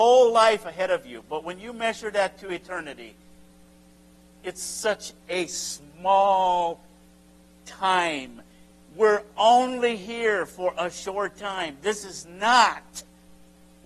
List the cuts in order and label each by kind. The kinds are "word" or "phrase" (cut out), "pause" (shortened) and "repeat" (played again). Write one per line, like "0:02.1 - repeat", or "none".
none